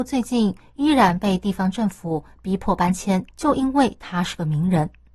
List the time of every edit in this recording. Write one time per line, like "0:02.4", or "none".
0:03.3